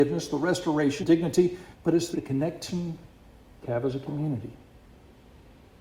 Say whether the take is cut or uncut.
cut